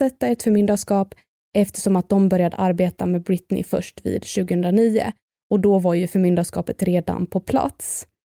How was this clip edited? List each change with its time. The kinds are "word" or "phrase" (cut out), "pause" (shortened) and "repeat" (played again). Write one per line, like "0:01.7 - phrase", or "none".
none